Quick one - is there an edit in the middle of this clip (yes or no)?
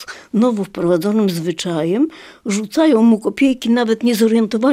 no